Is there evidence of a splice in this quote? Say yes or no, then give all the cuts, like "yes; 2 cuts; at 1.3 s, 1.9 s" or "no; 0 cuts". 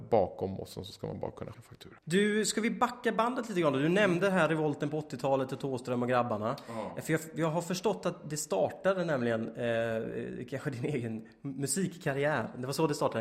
yes; 2 cuts; at 1.5 s, 2.0 s